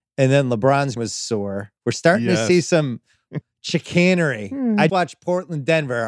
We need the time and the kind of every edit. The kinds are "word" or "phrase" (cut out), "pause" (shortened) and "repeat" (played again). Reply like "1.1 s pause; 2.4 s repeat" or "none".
1.0 s word; 1.8 s pause; 3.4 s word; 4.9 s word